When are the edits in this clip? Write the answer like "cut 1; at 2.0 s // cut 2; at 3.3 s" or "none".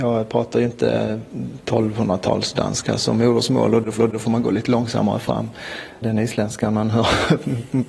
cut 1; at 4.0 s